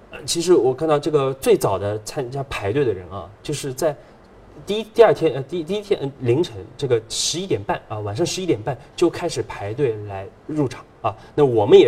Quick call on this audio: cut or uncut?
uncut